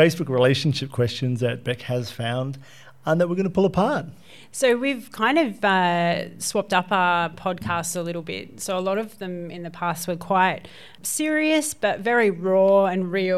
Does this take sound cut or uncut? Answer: uncut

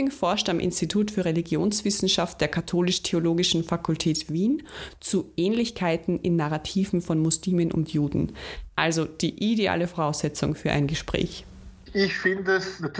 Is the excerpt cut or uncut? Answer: uncut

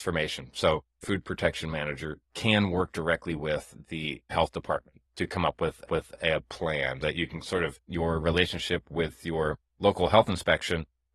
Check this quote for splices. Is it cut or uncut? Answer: cut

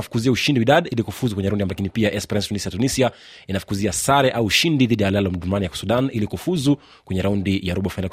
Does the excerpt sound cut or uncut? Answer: cut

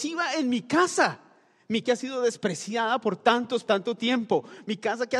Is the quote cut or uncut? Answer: cut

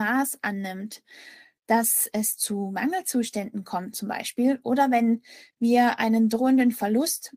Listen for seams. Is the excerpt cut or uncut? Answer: uncut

